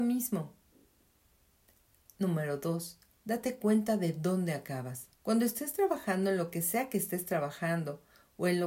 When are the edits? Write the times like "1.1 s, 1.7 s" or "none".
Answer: 3.1 s, 5.1 s